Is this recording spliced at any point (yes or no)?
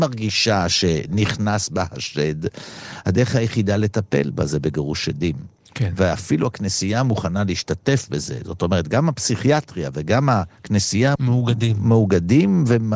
no